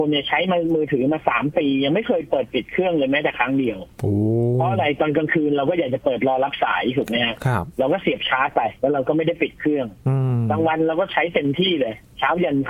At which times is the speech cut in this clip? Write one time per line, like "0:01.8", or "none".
0:08.8
0:10.0